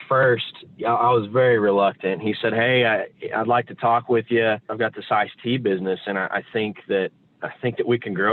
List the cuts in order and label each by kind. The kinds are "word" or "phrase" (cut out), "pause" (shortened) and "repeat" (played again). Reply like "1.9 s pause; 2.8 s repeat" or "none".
none